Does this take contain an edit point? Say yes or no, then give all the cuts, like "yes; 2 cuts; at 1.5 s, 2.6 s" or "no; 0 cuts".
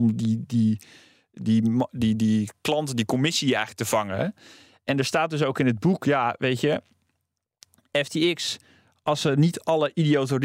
no; 0 cuts